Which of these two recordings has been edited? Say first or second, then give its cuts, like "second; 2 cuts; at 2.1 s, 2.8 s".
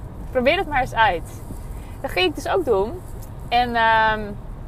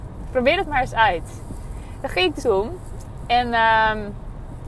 second; 1 cut; at 2.4 s